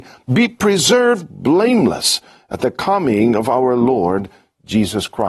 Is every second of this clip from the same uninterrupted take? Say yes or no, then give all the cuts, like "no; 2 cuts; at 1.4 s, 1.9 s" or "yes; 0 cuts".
yes; 0 cuts